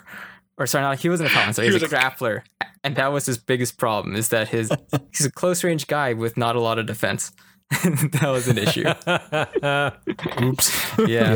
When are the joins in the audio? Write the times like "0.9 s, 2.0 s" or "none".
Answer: 1.9 s, 2.8 s, 4.7 s